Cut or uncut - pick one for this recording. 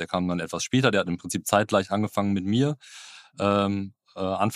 uncut